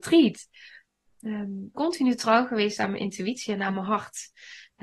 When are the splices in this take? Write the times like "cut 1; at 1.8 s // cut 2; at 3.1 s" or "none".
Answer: cut 1; at 1.7 s

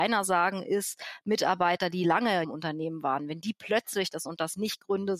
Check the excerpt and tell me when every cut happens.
cut 1; at 2.4 s // cut 2; at 4.3 s

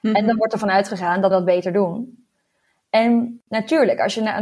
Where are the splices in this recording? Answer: cut 1; at 1.3 s

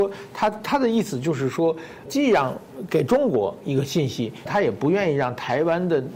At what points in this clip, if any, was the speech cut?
cut 1; at 2.1 s // cut 2; at 4.5 s

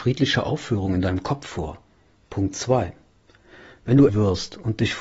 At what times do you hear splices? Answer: cut 1; at 4.1 s

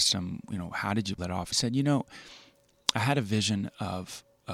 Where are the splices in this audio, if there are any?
cut 1; at 1.2 s // cut 2; at 1.5 s

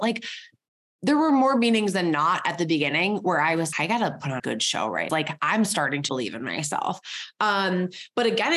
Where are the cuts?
cut 1; at 3.7 s // cut 2; at 4.4 s // cut 3; at 5.1 s // cut 4; at 6.1 s

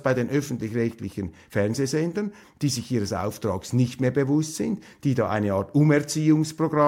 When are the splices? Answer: none

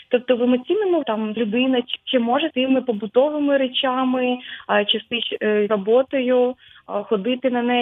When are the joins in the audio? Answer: cut 1; at 1.0 s // cut 2; at 1.4 s // cut 3; at 2.0 s // cut 4; at 2.5 s // cut 5; at 5.7 s

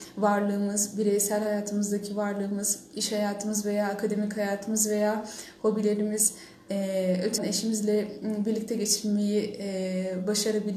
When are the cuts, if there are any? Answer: cut 1; at 7.4 s

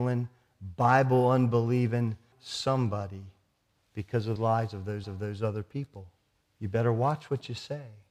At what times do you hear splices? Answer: cut 1; at 2.3 s // cut 2; at 4.4 s // cut 3; at 5.0 s // cut 4; at 6.4 s

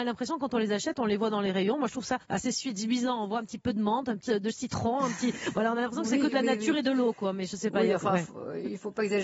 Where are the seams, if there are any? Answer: cut 1; at 2.2 s // cut 2; at 4.3 s

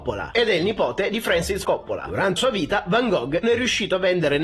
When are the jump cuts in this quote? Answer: cut 1; at 1.6 s // cut 2; at 2.4 s // cut 3; at 3.4 s

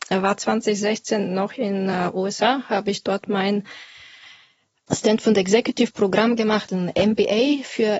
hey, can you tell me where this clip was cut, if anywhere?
none

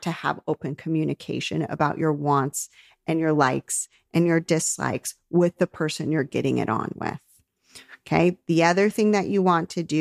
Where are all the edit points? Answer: none

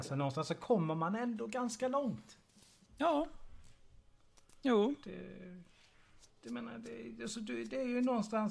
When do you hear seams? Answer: cut 1; at 6.3 s

